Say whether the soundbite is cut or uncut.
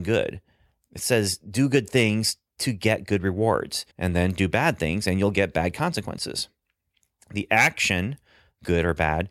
cut